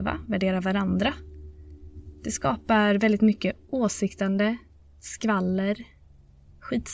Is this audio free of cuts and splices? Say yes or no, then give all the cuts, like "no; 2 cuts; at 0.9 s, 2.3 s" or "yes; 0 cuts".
yes; 0 cuts